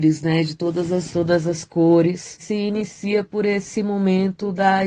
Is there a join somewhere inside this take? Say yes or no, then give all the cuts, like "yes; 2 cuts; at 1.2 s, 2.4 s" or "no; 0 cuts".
yes; 2 cuts; at 1.1 s, 2.4 s